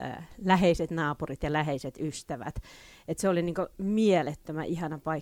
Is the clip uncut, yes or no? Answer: yes